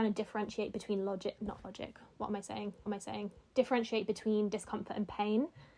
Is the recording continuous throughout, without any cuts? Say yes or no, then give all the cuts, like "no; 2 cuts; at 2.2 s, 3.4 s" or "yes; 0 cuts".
no; 2 cuts; at 1.4 s, 2.9 s